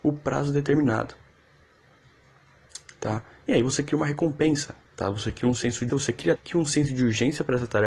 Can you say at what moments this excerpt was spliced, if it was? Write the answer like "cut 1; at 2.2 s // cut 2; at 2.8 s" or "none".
cut 1; at 4.8 s // cut 2; at 5.9 s // cut 3; at 6.4 s